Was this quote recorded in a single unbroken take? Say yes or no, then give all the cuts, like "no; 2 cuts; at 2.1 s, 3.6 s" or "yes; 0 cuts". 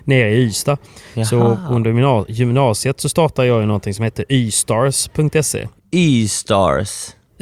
yes; 0 cuts